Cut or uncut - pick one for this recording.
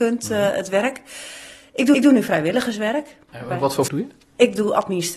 cut